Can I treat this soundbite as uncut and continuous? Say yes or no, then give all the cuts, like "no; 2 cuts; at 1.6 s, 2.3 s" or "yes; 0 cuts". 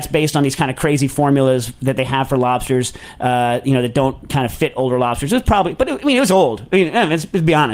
yes; 0 cuts